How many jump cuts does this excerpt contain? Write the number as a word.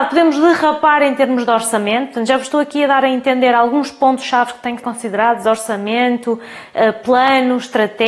one